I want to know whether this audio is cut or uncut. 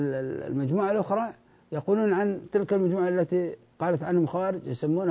uncut